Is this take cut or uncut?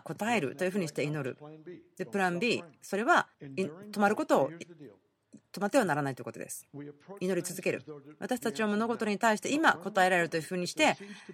cut